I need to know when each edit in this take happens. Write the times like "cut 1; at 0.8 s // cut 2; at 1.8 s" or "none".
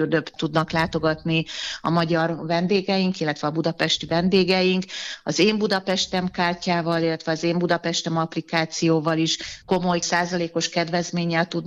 cut 1; at 9.6 s